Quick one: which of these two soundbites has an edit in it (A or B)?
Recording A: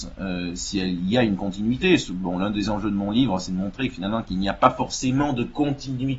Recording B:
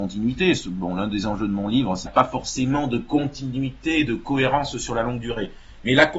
B